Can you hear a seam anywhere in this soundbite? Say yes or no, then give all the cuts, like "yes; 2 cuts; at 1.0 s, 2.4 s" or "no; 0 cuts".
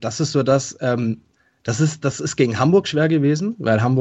yes; 2 cuts; at 1.4 s, 2.0 s